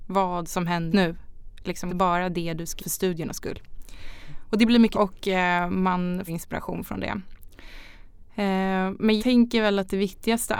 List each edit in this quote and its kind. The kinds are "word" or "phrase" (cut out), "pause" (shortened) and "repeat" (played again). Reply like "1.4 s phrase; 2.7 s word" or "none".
0.9 s word; 1.9 s word; 2.8 s word; 4.9 s word; 6.3 s word; 9.2 s word